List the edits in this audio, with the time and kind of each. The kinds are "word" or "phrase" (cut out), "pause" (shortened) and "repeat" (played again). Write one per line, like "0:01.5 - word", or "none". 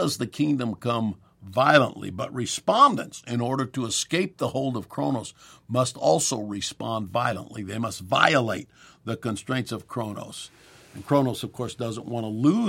none